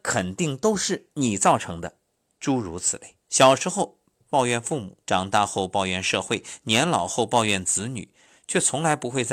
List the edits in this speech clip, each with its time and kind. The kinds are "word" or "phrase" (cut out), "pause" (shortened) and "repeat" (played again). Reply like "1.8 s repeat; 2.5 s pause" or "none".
2.2 s pause; 3.2 s pause; 5.0 s pause